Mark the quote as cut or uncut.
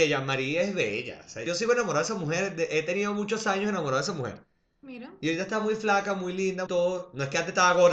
cut